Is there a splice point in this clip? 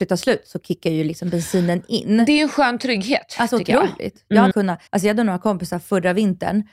yes; 2 cuts; at 4.5 s, 4.9 s

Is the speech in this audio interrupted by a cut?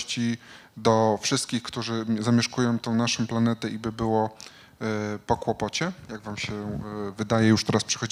no; 0 cuts

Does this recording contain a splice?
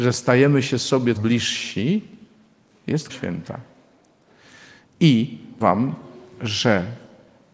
yes; 3 cuts; at 1.2 s, 3.1 s, 5.6 s

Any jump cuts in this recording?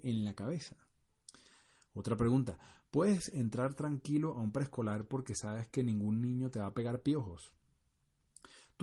no; 0 cuts

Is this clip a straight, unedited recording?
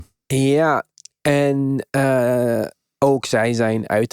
yes; 0 cuts

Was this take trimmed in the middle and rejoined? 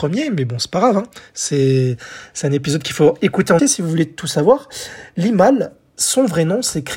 yes; 1 cut; at 3.6 s

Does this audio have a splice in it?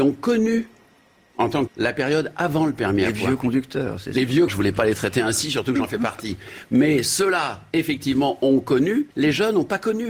yes; 3 cuts; at 1.7 s, 4.5 s, 9.1 s

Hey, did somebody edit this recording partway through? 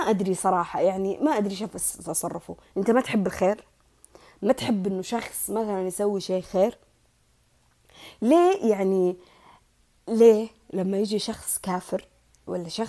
no; 0 cuts

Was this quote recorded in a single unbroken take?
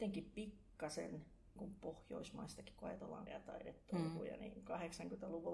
no; 2 cuts; at 1.6 s, 3.3 s

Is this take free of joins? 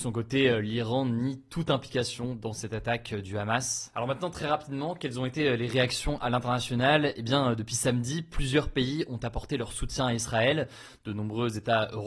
yes; 0 cuts

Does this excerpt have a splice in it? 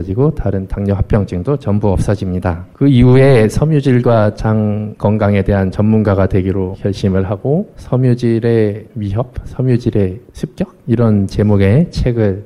yes; 1 cut; at 2.7 s

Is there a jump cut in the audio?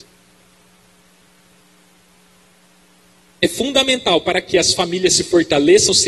no; 0 cuts

